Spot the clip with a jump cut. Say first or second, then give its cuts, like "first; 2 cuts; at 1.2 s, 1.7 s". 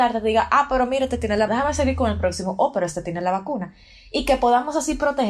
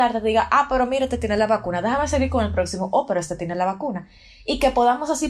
first; 1 cut; at 1.5 s